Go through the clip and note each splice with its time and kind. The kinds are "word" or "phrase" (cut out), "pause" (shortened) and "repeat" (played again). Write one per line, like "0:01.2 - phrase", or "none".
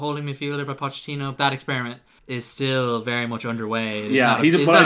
0:01.4 - phrase
0:02.2 - pause